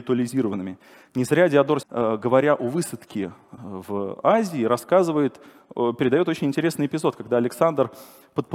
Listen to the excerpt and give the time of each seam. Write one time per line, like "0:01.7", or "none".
0:01.8
0:03.6